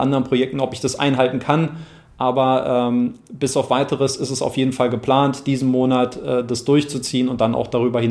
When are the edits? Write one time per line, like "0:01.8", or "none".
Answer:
none